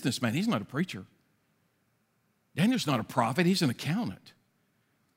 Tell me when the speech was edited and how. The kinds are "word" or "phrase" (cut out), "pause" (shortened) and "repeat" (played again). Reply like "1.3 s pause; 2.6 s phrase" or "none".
none